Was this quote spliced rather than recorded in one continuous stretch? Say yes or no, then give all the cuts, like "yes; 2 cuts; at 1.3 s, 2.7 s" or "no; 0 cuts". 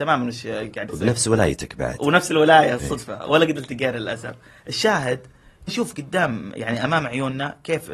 yes; 1 cut; at 5.7 s